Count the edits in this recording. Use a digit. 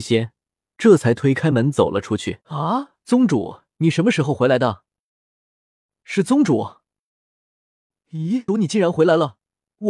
2